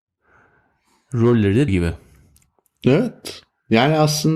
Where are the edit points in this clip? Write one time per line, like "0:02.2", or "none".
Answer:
0:01.7